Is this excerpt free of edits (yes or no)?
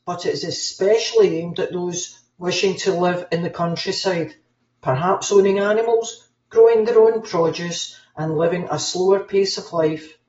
yes